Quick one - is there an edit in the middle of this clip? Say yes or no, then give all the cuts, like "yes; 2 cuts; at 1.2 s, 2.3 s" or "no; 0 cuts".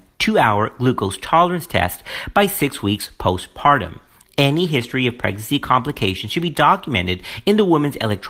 no; 0 cuts